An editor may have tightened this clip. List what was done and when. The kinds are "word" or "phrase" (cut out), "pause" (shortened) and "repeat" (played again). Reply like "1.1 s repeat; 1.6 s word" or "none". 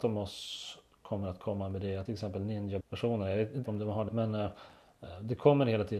2.1 s word; 2.8 s word; 3.6 s word; 4.1 s word